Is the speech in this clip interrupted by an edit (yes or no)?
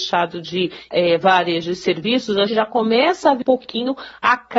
yes